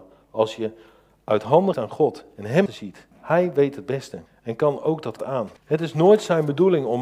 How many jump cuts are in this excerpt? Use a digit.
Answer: 6